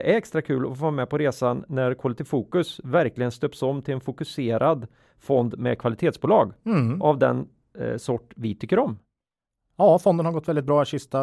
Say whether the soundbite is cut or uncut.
uncut